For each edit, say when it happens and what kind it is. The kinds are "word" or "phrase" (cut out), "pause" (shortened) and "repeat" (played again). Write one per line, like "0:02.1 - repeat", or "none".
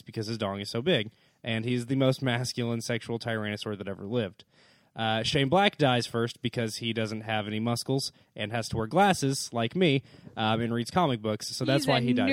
none

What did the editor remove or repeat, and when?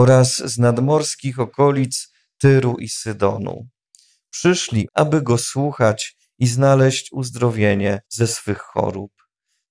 0:04.9 - word
0:08.0 - pause

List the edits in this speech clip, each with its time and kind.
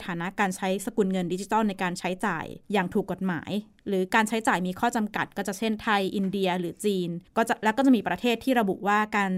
0:02.6 - pause
0:07.3 - pause

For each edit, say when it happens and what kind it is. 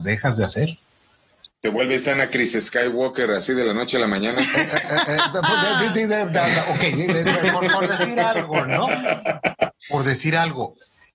none

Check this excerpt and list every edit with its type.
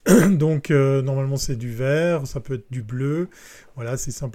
none

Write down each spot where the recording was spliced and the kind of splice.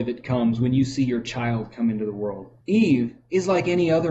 0:02.6 - pause

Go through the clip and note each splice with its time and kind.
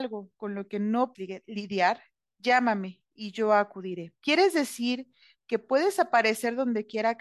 0:01.1 - word
0:04.2 - pause

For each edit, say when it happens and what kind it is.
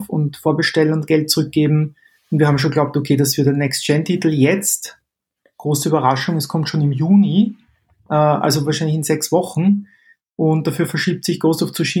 none

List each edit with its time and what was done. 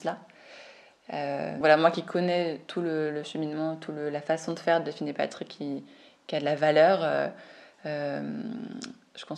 0:01.6 - word

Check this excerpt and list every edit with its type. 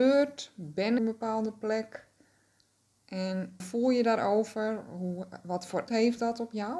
0:01.0 - phrase
0:03.6 - phrase
0:05.9 - word

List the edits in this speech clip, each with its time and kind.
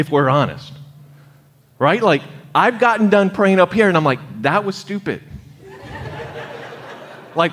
none

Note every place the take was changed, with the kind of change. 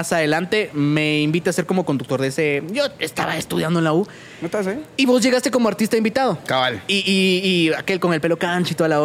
none

